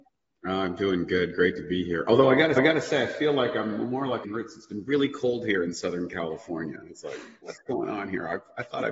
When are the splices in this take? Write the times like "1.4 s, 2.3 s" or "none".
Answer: 2.6 s, 4.2 s